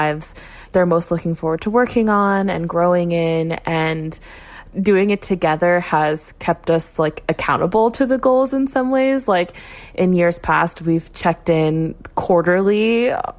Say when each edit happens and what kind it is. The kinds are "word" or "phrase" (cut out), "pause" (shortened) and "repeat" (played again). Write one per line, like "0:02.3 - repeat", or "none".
none